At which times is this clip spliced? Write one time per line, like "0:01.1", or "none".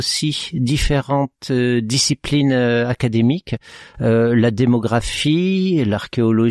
0:01.4